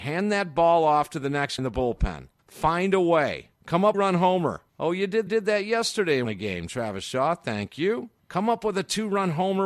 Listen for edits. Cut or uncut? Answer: cut